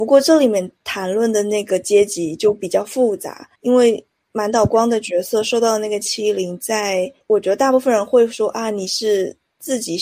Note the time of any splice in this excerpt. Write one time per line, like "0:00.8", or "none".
0:03.5

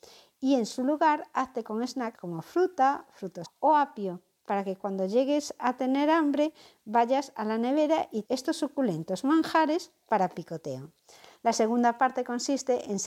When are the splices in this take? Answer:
0:02.2
0:03.4
0:08.2

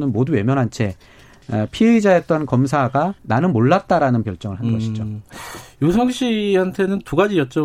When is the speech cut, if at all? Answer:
0:03.2
0:04.2

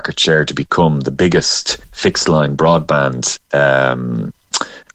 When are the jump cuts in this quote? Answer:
0:01.8

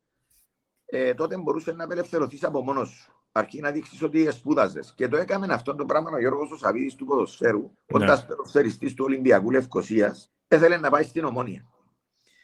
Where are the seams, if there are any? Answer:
0:07.8
0:10.3

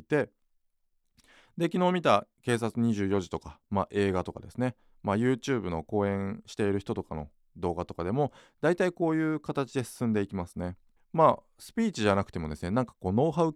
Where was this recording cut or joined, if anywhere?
0:11.0

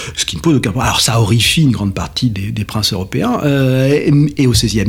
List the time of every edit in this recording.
0:02.3

